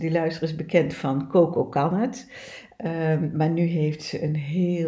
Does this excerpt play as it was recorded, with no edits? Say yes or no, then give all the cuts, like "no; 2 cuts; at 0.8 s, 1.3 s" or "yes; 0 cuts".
yes; 0 cuts